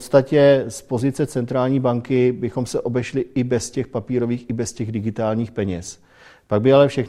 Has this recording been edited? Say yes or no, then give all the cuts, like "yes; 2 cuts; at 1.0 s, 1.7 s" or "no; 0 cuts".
no; 0 cuts